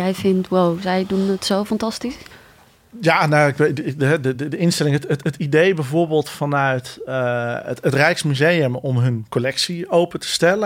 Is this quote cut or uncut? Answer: uncut